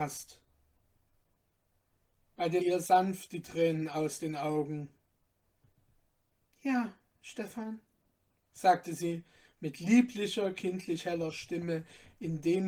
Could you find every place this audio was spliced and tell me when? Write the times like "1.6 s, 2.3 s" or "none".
2.6 s